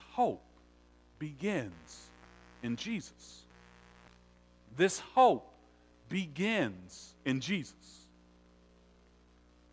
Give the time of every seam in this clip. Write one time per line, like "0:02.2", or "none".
0:07.2